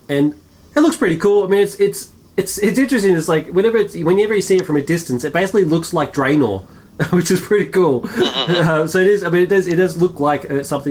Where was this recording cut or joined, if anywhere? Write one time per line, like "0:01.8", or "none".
none

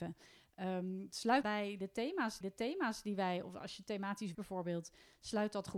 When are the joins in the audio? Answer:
0:01.4
0:02.4
0:04.3

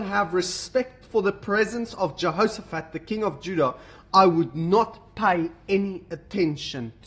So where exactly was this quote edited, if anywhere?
none

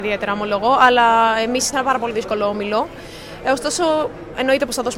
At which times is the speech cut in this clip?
0:01.7

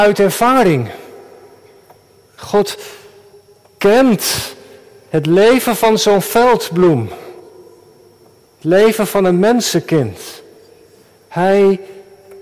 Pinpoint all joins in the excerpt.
none

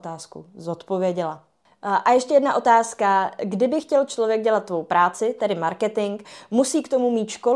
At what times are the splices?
none

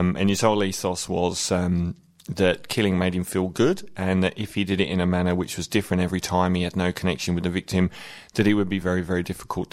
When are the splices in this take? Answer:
none

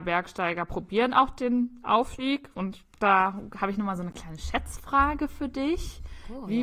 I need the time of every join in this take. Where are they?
none

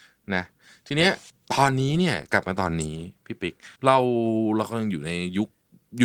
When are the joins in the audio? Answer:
0:01.3
0:03.8

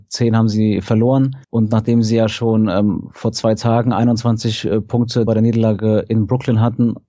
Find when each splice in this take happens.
0:01.4
0:05.3

